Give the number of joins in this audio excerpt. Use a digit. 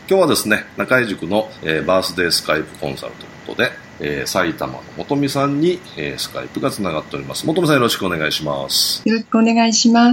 1